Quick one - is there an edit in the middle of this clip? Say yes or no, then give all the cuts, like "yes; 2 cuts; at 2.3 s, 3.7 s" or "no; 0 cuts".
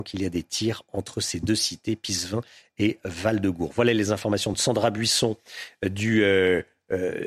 no; 0 cuts